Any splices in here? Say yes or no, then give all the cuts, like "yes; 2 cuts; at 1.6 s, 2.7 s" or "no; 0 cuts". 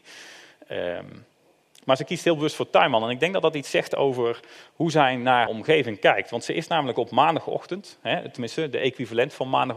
yes; 1 cut; at 5.5 s